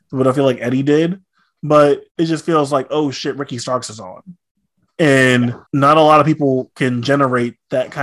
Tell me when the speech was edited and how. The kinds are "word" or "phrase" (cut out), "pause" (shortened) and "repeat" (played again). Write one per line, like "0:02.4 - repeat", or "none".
0:02.1 - pause
0:05.7 - pause